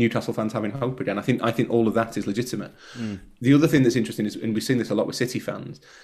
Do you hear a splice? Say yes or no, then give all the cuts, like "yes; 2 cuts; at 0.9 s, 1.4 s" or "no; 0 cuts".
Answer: no; 0 cuts